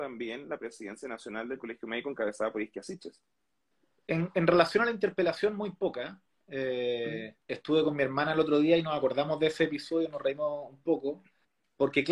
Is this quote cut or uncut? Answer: cut